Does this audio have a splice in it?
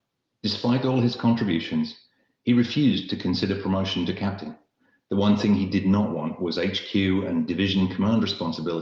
no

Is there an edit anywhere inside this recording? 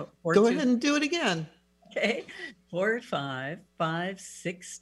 yes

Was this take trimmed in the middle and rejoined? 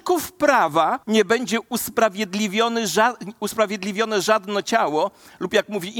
yes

